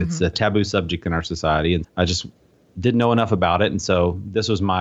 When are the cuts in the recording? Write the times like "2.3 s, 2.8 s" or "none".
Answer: 1.8 s